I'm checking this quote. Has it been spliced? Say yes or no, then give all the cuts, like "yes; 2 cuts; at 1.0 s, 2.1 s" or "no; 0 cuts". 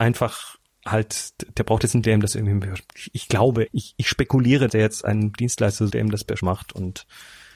yes; 5 cuts; at 2.0 s, 3.7 s, 4.7 s, 5.9 s, 6.4 s